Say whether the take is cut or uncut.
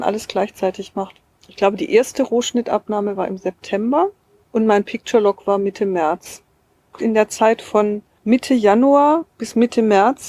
uncut